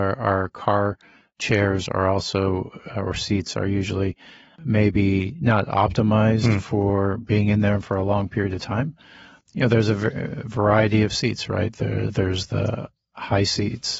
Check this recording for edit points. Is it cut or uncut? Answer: uncut